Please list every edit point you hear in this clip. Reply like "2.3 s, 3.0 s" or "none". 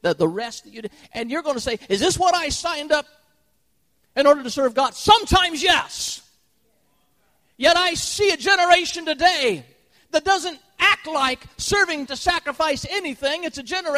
12.1 s